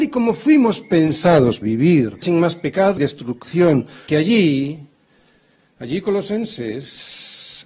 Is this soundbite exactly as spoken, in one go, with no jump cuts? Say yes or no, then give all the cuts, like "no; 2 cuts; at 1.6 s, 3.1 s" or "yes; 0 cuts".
no; 4 cuts; at 1.6 s, 2.2 s, 3.0 s, 4.1 s